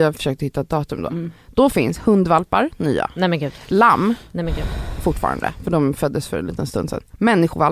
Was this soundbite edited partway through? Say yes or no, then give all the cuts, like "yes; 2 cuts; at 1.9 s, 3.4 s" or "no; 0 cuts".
no; 0 cuts